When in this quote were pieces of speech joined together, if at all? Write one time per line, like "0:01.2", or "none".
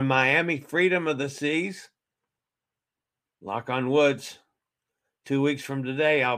none